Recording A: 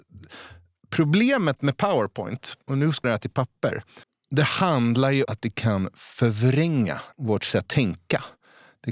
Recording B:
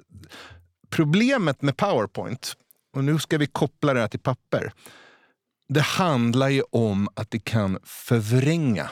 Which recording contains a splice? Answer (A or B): A